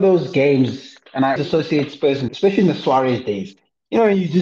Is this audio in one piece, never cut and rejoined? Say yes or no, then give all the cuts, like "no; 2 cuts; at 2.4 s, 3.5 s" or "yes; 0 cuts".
no; 2 cuts; at 1.4 s, 2.3 s